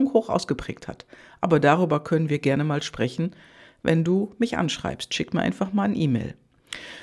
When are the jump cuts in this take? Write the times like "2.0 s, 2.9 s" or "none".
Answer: none